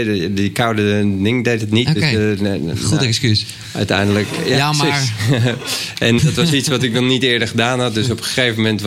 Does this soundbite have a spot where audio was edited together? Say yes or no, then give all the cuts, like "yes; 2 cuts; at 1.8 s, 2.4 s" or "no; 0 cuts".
yes; 1 cut; at 6.2 s